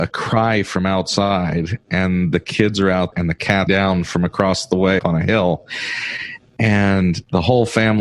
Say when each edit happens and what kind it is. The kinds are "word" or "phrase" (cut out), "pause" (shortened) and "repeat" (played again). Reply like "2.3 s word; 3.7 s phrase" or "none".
3.1 s word; 3.7 s word; 5.0 s word